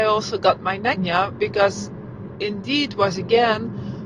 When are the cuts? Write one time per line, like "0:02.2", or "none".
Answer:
0:01.0
0:02.3